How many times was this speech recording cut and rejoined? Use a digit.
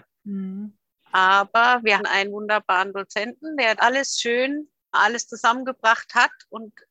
3